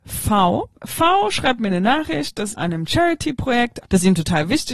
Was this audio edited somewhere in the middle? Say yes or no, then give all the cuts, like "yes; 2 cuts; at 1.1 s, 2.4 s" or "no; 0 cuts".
yes; 2 cuts; at 2.5 s, 3.8 s